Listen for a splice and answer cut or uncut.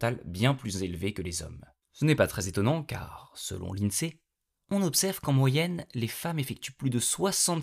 uncut